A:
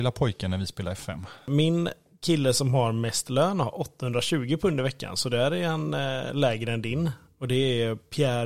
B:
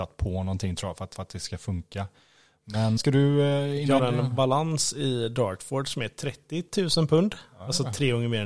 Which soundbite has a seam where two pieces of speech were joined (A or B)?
B